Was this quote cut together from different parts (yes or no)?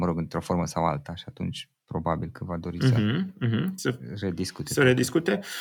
no